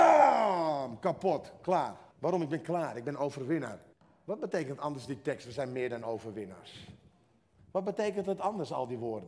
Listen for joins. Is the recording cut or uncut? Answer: cut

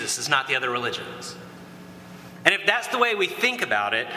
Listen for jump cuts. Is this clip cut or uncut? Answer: uncut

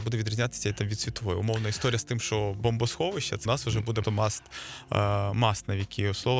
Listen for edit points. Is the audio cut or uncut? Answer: cut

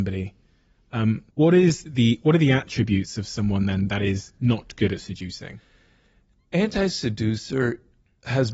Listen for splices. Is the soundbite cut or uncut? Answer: cut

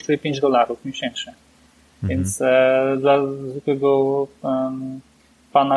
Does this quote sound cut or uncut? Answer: uncut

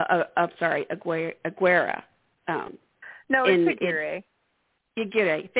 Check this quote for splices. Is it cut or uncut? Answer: uncut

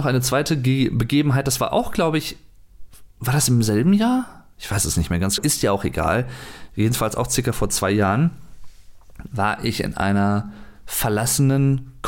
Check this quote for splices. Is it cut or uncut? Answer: cut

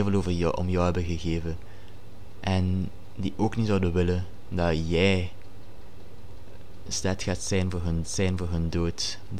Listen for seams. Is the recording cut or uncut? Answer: cut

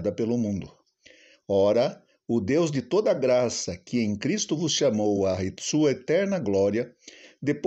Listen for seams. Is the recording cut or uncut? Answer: uncut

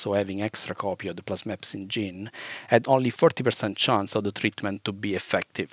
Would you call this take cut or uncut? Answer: uncut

